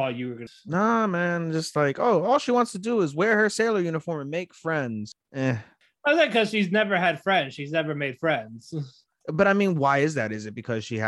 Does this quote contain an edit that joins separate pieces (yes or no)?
no